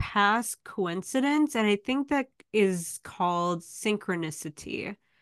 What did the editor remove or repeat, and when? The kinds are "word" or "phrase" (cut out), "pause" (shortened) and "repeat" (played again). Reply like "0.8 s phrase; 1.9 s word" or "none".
none